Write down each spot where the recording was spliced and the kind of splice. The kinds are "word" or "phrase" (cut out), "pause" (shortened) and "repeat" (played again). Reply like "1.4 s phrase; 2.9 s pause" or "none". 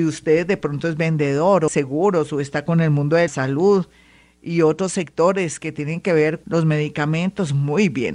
1.7 s word; 3.3 s word; 6.4 s word